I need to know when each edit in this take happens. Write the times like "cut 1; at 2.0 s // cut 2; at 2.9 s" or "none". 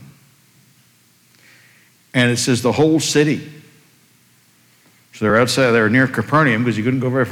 none